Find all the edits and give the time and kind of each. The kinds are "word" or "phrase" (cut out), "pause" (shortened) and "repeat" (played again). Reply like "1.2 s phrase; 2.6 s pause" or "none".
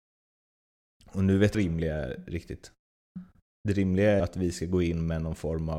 1.5 s phrase; 3.4 s pause; 4.2 s word